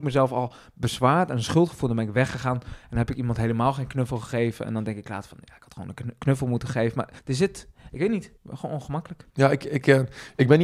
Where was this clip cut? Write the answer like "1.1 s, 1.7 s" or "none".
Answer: 7.2 s, 8.4 s, 9.3 s